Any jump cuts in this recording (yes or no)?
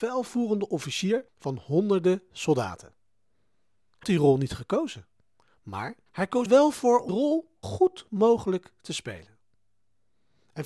yes